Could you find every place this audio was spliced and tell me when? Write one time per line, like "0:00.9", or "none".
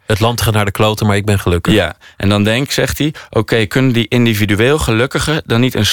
0:02.7